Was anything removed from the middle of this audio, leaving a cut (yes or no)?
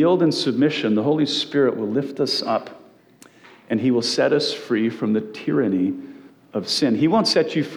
no